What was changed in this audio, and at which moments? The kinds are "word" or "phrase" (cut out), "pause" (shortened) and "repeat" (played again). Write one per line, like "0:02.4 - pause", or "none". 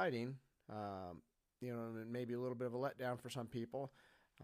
none